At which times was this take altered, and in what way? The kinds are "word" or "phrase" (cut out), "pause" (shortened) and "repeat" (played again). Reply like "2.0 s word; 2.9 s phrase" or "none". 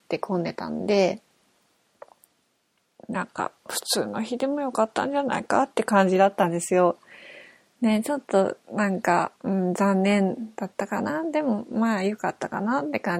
9.4 s pause